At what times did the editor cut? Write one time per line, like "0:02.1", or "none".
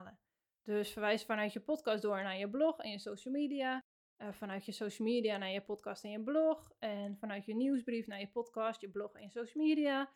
none